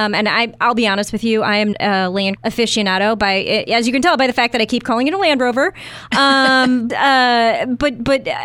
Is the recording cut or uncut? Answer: cut